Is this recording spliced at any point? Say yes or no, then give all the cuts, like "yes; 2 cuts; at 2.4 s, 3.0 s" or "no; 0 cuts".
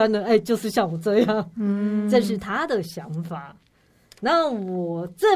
no; 0 cuts